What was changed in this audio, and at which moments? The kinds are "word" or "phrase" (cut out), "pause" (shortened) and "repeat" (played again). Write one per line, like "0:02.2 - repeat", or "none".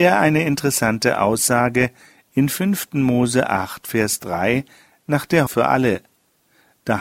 0:05.5 - word